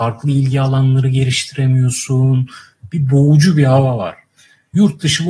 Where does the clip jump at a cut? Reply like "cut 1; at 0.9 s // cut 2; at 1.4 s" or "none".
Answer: none